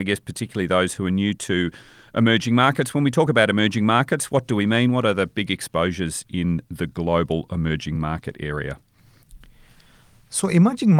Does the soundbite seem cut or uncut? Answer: uncut